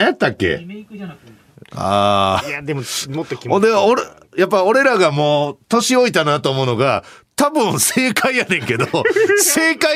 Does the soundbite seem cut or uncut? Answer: uncut